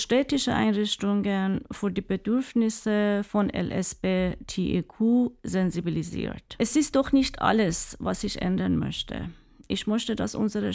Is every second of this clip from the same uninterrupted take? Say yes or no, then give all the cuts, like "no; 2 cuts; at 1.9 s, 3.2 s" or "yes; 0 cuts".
yes; 0 cuts